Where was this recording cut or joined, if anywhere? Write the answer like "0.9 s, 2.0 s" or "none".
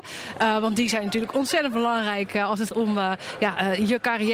2.7 s